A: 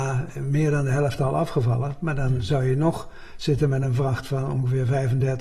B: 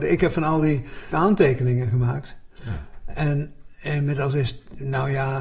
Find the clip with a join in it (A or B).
B